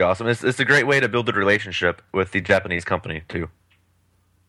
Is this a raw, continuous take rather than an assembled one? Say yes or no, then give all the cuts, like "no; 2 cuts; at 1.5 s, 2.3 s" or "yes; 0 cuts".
yes; 0 cuts